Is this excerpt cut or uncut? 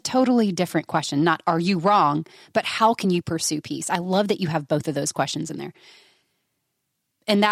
uncut